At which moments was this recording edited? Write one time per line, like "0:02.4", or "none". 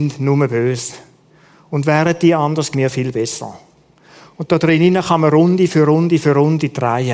0:02.7